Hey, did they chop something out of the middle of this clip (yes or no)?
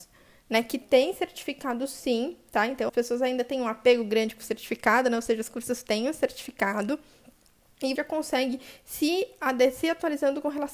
yes